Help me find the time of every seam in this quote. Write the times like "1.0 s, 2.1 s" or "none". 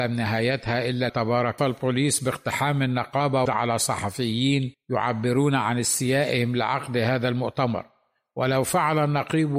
1.1 s, 1.6 s, 3.5 s, 4.7 s